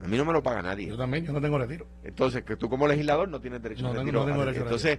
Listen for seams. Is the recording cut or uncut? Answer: uncut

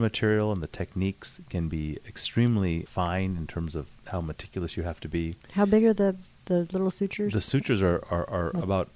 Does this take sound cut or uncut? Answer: uncut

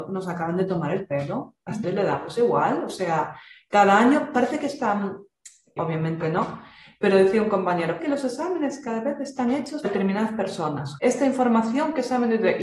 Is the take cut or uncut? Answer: cut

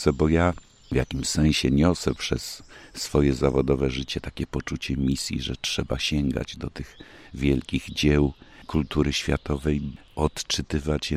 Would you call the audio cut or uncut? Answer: uncut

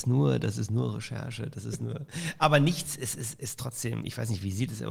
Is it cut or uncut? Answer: uncut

